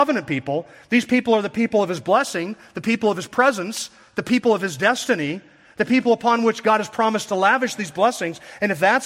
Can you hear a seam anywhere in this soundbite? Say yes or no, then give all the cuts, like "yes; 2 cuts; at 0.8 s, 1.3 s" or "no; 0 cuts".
no; 0 cuts